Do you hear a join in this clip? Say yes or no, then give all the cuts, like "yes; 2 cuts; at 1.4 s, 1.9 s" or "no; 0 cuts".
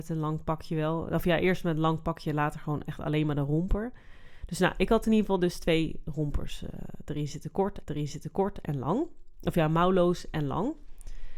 yes; 1 cut; at 7.8 s